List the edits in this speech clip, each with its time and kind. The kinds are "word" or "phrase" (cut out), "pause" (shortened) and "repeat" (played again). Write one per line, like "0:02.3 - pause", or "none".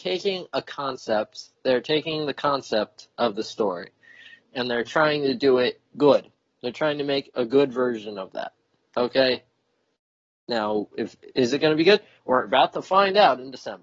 0:03.1 - pause